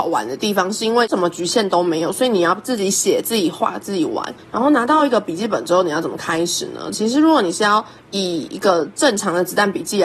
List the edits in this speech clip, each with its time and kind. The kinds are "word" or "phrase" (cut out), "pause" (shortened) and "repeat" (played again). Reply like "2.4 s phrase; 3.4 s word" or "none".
4.4 s pause